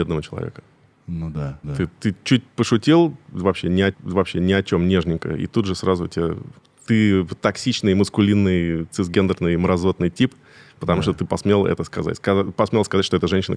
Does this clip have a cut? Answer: yes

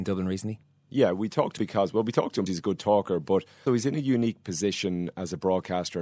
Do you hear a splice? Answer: yes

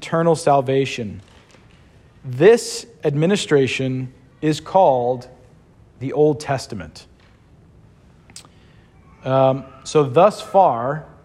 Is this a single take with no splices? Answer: yes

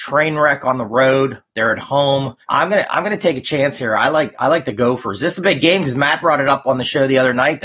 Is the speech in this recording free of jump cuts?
no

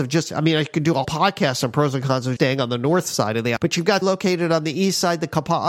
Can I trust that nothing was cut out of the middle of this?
no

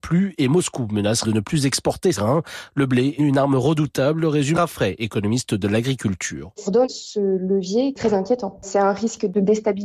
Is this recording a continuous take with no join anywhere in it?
no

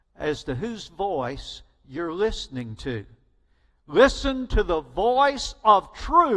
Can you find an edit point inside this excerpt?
no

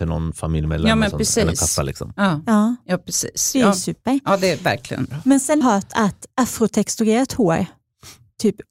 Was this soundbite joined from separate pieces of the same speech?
yes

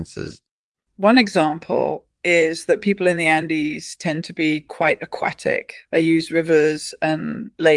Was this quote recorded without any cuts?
yes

